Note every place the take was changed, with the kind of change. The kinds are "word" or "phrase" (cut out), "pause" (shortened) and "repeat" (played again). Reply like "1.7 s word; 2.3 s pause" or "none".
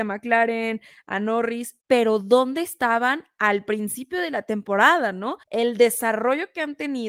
1.8 s pause; 5.4 s pause